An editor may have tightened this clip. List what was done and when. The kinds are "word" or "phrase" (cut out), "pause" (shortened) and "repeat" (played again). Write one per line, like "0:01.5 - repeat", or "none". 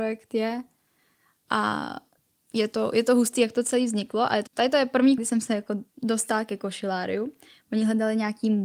0:02.2 - pause
0:04.5 - word
0:05.2 - word
0:05.9 - pause